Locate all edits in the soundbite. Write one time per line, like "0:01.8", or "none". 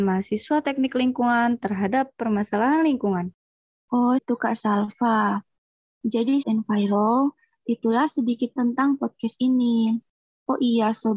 0:04.2
0:06.4
0:08.6